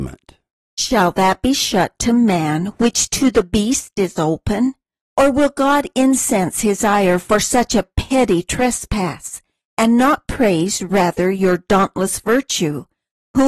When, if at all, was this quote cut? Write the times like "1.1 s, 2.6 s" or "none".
none